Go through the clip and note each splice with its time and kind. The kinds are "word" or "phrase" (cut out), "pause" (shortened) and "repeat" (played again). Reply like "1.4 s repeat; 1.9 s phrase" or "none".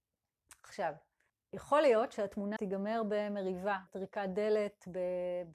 1.3 s pause; 2.6 s word; 3.9 s word